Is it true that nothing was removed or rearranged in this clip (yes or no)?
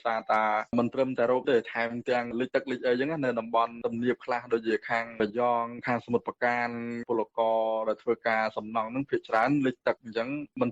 no